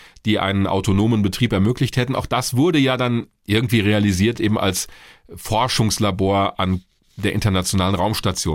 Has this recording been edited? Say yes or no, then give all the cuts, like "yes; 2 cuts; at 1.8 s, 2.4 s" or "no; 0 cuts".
no; 0 cuts